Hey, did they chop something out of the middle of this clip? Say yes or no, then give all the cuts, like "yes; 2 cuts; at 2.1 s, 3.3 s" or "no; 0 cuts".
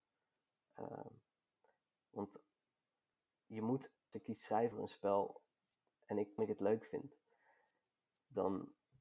yes; 3 cuts; at 4.1 s, 4.7 s, 6.4 s